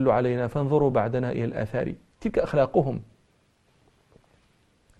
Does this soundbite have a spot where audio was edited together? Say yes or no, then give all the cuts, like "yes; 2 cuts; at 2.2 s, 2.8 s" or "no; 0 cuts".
no; 0 cuts